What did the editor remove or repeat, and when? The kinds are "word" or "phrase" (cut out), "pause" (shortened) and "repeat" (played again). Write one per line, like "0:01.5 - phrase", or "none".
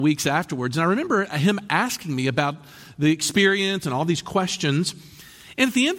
none